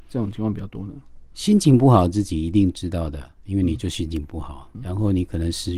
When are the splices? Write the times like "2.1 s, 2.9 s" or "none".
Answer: 4.7 s

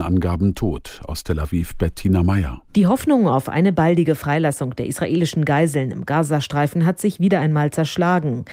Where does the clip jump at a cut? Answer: 2.7 s

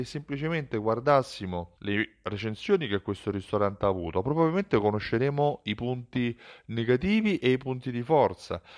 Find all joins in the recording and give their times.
1.8 s

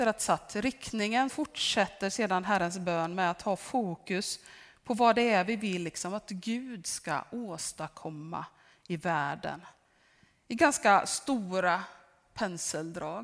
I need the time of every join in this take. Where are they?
1.3 s

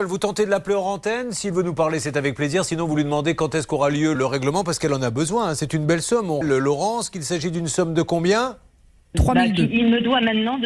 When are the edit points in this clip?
4.2 s, 6.4 s, 9.1 s

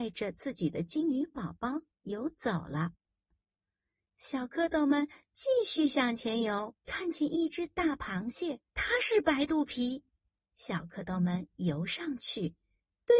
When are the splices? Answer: 6.8 s, 8.7 s, 10.3 s

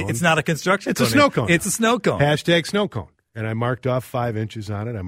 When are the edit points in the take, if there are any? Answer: 3.2 s

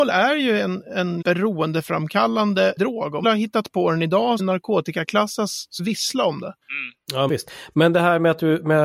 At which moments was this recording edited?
1.2 s, 2.8 s, 3.2 s, 4.4 s, 5.8 s, 6.6 s, 7.3 s

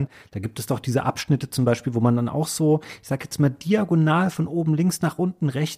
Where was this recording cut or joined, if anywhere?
none

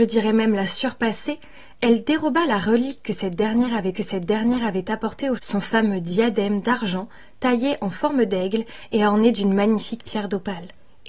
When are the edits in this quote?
3.9 s, 5.4 s

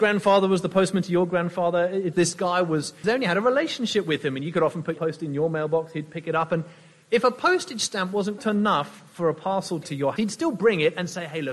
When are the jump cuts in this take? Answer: 2.1 s, 3.0 s, 5.0 s, 8.4 s, 9.8 s, 10.2 s

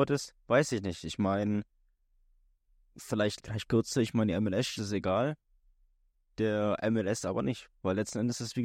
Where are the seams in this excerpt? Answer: 3.4 s, 4.8 s

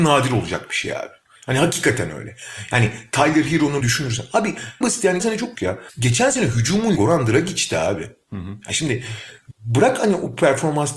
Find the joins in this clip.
3.8 s, 4.8 s, 5.2 s, 5.5 s, 7.0 s, 9.5 s

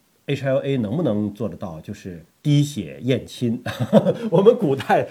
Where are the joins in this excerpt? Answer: 2.3 s

